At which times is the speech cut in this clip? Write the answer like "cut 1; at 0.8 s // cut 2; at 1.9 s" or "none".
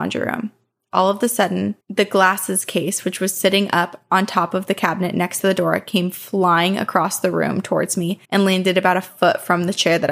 cut 1; at 1.8 s // cut 2; at 8.2 s